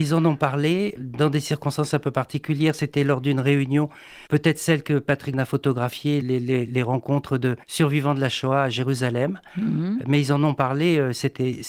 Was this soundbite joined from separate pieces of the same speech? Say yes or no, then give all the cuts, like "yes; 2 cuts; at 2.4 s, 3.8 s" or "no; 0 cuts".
yes; 5 cuts; at 1.0 s, 4.3 s, 5.3 s, 6.2 s, 7.6 s